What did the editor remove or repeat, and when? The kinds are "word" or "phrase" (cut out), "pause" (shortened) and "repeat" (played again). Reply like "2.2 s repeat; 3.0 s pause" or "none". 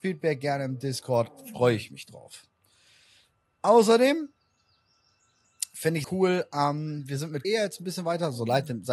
6.0 s word; 7.4 s word